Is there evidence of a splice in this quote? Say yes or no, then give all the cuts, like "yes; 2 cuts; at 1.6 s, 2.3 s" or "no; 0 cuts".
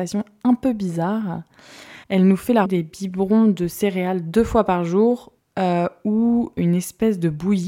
yes; 4 cuts; at 2.0 s, 2.7 s, 5.4 s, 6.6 s